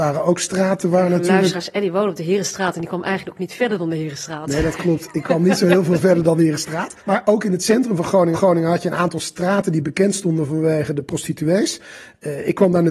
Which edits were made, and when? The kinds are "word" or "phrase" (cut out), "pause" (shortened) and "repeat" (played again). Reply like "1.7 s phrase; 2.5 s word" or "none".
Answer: 7.0 s pause; 8.3 s repeat